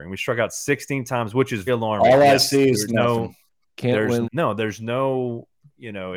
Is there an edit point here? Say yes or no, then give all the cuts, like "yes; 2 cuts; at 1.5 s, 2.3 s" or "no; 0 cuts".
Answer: yes; 3 cuts; at 1.7 s, 2.9 s, 4.2 s